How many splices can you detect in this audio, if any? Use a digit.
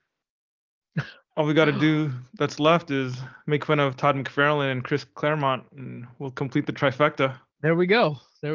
2